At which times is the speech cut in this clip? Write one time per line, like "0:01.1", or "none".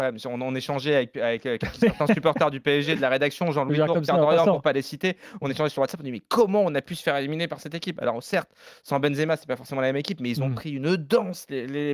none